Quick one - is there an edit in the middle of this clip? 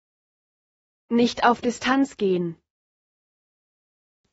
no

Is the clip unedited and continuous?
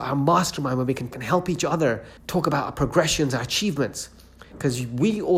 no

